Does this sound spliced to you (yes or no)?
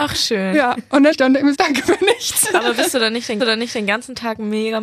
yes